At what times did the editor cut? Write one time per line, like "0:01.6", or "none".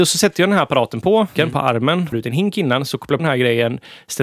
0:01.4
0:02.1
0:03.2

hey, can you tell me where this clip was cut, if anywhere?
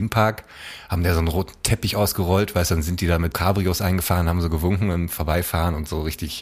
0:03.3

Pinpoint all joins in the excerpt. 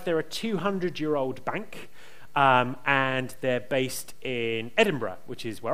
none

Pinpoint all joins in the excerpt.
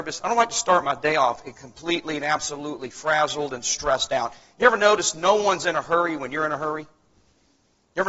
none

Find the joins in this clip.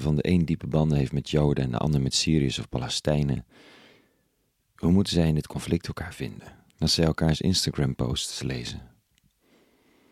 0:06.7

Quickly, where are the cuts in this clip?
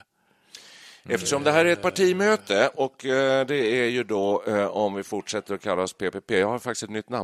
none

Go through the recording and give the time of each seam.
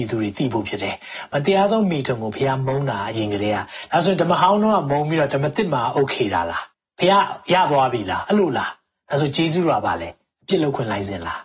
0:06.7

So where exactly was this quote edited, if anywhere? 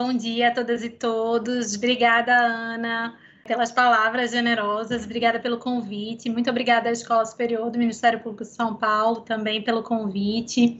none

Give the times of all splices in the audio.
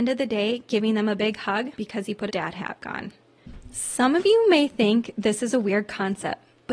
0:01.7
0:02.3
0:02.8

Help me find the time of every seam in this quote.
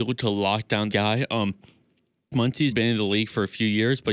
0:00.9
0:02.3
0:02.7

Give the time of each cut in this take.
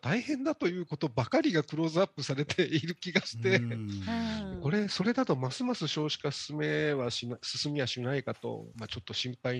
none

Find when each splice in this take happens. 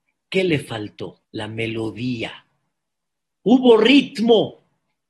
0:01.2

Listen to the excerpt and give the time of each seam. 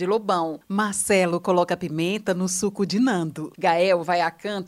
none

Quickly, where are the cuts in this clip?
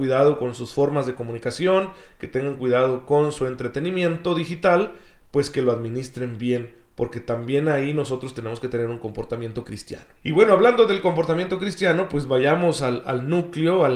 0:10.2

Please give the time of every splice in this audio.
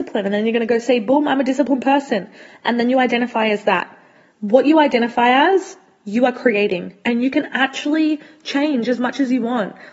none

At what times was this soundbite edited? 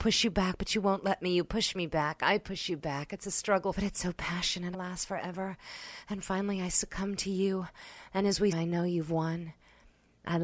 0:03.8
0:04.7
0:08.5

